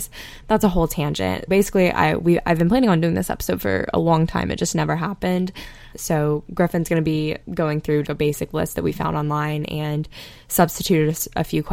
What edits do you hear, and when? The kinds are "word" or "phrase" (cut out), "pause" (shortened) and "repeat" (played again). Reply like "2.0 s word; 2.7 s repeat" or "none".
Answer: 1.5 s word; 5.9 s word; 7.4 s pause; 8.1 s phrase